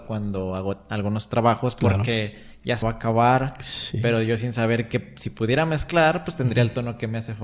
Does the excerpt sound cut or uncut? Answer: cut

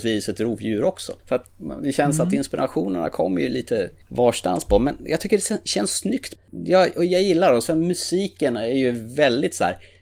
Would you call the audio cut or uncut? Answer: cut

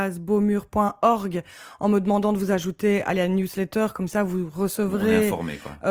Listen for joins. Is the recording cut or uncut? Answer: uncut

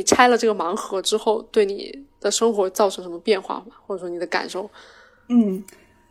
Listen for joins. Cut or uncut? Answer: uncut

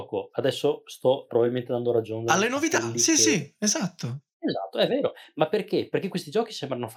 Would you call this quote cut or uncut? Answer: uncut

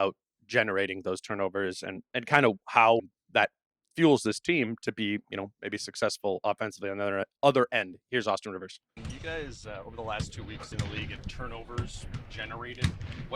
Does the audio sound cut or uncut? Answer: cut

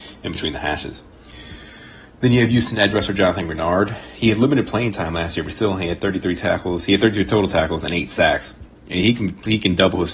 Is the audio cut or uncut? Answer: uncut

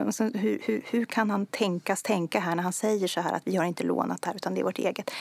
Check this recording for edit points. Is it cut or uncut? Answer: uncut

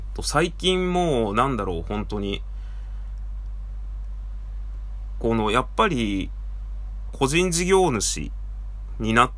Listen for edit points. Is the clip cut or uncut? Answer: cut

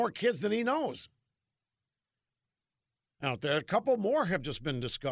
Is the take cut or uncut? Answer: uncut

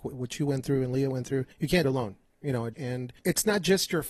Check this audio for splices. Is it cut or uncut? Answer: cut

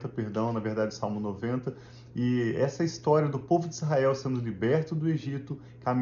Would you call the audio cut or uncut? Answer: uncut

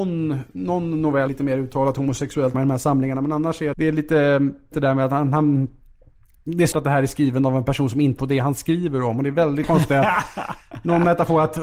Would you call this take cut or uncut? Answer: cut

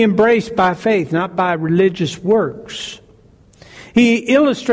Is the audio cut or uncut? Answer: uncut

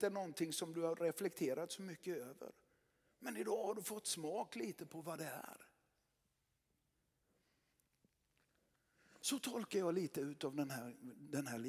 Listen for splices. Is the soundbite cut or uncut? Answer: uncut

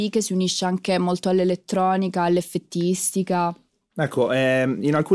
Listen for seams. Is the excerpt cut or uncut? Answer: uncut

